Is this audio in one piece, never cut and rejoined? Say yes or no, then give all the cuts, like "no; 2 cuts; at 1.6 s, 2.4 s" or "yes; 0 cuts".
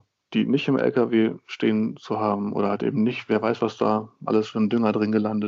yes; 0 cuts